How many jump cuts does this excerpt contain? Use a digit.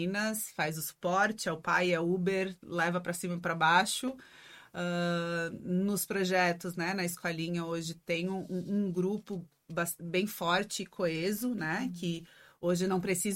0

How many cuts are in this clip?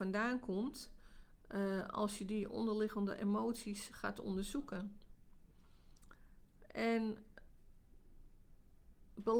0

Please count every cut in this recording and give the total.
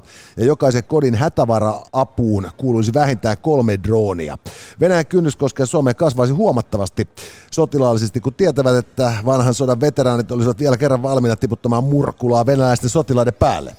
1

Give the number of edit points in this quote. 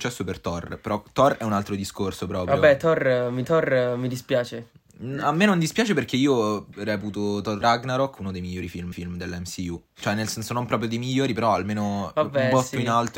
4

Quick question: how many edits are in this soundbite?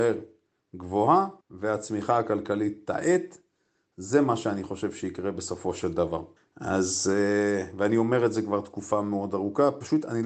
2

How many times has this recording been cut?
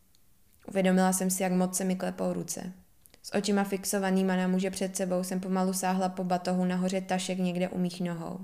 1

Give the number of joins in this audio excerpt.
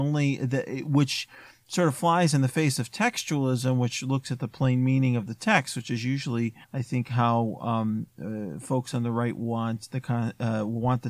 1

